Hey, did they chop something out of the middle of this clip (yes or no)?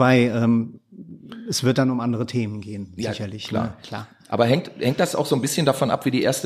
no